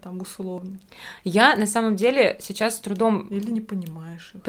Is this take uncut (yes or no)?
yes